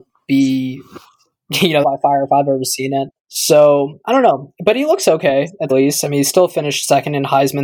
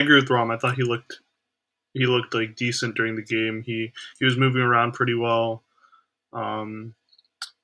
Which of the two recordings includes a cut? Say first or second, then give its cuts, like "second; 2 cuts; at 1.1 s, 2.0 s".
first; 3 cuts; at 1.8 s, 3.2 s, 5.7 s